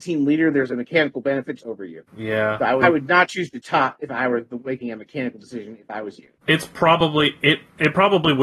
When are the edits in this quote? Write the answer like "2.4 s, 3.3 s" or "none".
1.6 s, 2.1 s, 2.8 s, 6.4 s